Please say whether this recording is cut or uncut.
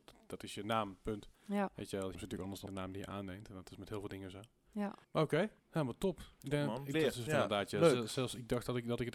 cut